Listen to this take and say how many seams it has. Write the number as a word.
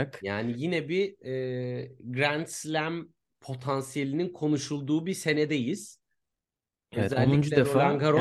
zero